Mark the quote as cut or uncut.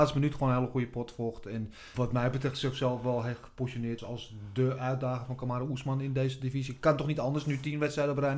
cut